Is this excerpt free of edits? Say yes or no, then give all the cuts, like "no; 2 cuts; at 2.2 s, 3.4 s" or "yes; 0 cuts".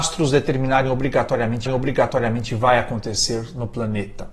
no; 1 cut; at 1.7 s